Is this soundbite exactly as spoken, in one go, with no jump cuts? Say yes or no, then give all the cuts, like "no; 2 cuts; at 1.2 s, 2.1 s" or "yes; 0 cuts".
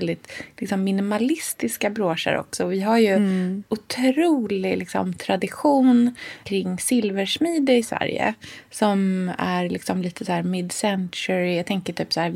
no; 1 cut; at 6.4 s